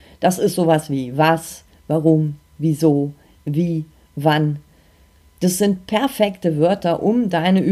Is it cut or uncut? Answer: uncut